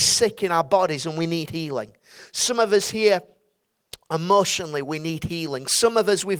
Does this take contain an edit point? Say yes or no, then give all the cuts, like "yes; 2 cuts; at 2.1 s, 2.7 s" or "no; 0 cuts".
no; 0 cuts